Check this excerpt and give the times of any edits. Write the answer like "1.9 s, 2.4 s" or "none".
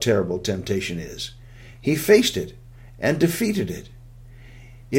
none